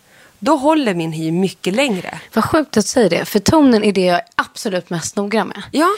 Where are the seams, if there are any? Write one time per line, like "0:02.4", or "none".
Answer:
none

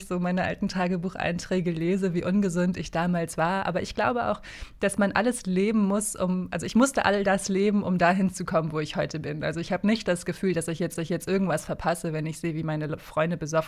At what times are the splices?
0:11.0

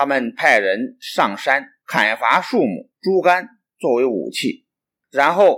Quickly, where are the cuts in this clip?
0:01.8
0:02.9

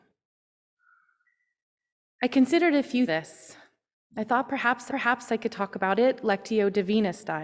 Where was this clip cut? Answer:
0:03.1
0:04.9

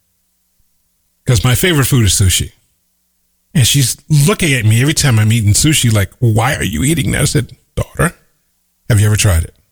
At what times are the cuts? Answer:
none

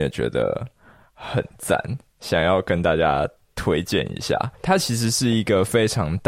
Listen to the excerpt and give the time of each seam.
none

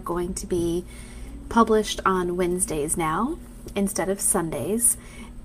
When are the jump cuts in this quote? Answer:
none

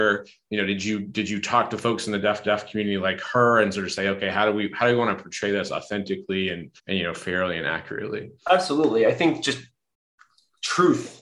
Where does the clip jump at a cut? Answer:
0:02.4
0:06.8
0:08.4

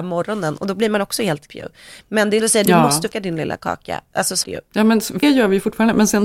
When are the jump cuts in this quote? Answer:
0:01.5
0:02.4
0:03.1
0:04.4
0:05.2

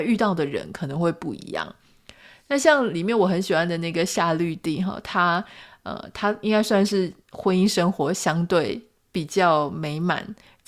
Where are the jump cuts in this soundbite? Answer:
none

